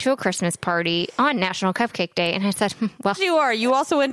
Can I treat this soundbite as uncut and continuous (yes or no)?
no